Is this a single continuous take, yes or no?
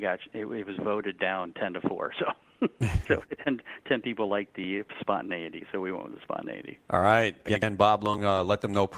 no